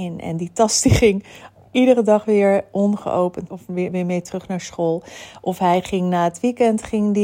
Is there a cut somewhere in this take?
yes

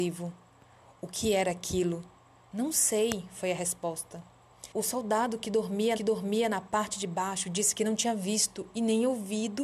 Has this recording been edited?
yes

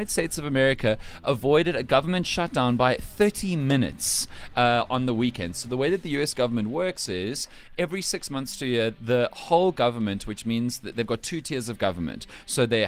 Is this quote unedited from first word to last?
yes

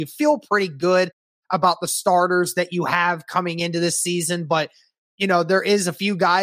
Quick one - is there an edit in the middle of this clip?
no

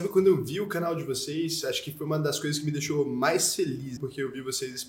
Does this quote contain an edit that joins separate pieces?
yes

